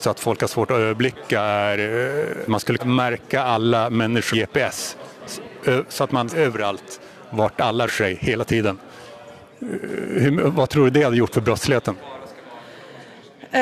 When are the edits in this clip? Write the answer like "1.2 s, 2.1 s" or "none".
2.5 s, 2.8 s, 4.3 s, 6.3 s, 7.9 s